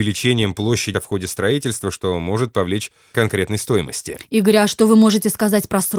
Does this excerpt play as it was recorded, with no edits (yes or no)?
no